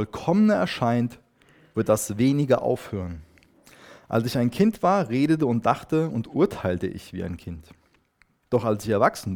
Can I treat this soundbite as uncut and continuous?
yes; 0 cuts

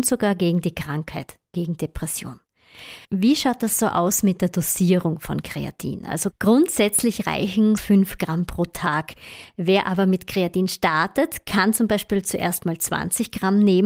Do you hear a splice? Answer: yes; 2 cuts; at 3.0 s, 7.8 s

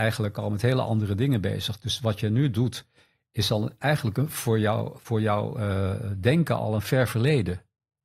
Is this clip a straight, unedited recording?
yes; 0 cuts

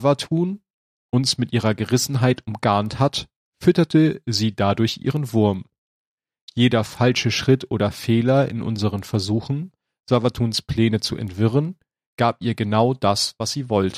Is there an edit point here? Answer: no; 0 cuts

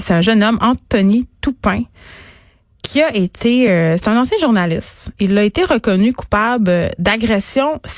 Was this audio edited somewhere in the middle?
no; 0 cuts

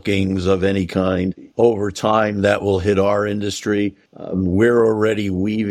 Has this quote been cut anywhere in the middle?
yes; 2 cuts; at 1.5 s, 4.1 s

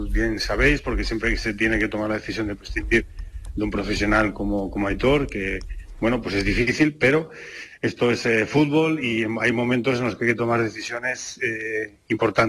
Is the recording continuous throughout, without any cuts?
yes; 0 cuts

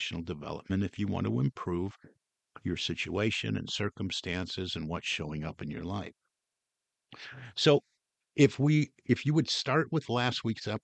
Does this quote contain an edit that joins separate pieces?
no; 0 cuts

